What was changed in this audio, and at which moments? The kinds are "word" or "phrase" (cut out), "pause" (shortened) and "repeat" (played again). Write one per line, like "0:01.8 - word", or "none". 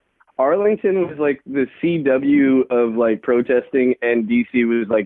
none